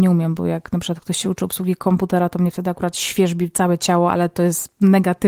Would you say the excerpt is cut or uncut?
uncut